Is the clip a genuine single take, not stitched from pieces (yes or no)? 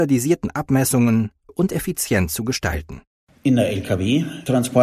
no